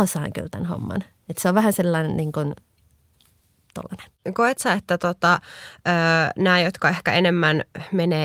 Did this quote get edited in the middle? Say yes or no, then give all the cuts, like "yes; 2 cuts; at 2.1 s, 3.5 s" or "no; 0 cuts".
no; 0 cuts